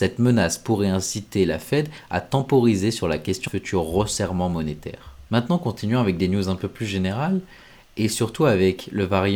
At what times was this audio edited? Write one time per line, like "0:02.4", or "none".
0:03.5
0:05.3